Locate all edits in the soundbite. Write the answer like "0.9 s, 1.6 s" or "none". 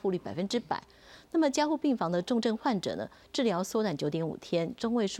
none